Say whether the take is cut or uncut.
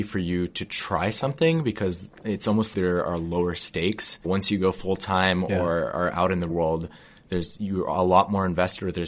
cut